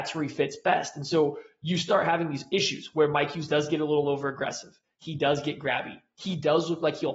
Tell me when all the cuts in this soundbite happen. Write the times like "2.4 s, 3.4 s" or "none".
none